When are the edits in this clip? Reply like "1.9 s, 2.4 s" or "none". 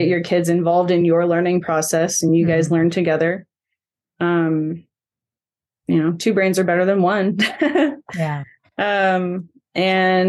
none